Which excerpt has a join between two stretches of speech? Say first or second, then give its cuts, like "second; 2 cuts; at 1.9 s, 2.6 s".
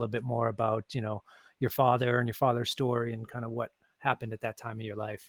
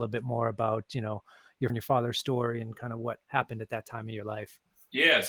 second; 2 cuts; at 1.7 s, 3.2 s